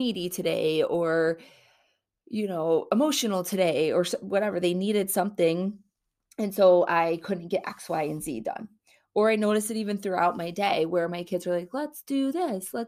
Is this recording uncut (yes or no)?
yes